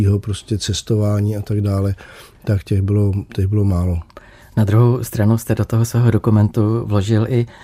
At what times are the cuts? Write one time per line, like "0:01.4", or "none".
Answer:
none